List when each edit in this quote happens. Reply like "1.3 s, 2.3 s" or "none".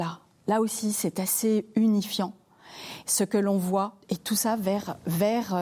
4.0 s